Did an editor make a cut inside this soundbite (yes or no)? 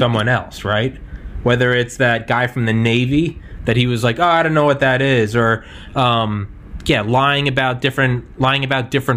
no